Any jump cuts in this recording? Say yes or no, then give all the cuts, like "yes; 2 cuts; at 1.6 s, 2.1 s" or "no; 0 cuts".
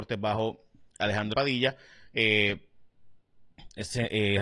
yes; 1 cut; at 1.3 s